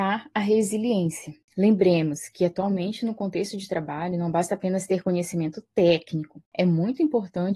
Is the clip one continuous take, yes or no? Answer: yes